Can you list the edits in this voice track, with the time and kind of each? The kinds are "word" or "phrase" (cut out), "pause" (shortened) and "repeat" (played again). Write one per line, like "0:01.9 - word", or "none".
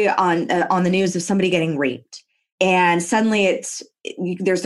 none